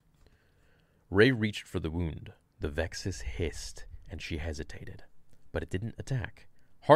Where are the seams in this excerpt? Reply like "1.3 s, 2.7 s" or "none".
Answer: none